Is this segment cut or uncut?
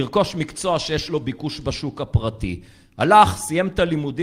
uncut